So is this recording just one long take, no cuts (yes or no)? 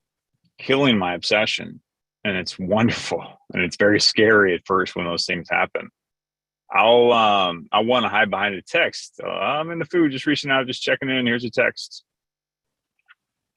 yes